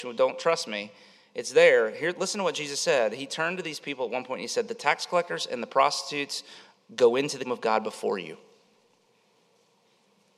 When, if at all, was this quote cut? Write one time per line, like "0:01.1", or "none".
0:07.4